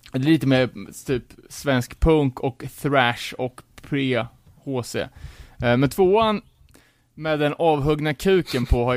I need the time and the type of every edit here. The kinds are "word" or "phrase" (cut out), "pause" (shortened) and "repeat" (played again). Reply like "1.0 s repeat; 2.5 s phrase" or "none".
none